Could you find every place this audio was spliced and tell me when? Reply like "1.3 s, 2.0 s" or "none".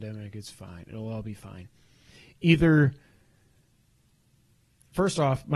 none